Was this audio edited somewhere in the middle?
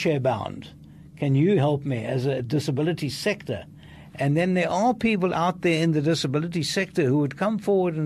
no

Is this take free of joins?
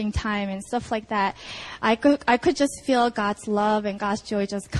yes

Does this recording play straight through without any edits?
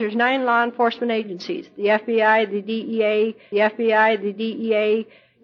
no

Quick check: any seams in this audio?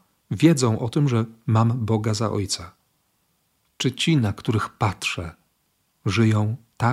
no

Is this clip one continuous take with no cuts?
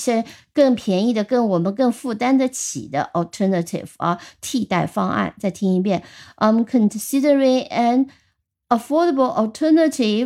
yes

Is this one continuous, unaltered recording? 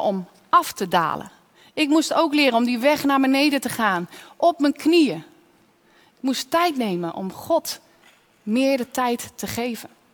yes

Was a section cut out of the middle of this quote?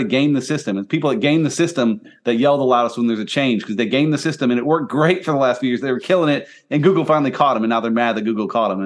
no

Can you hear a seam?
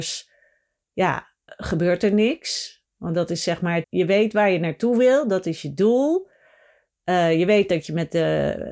yes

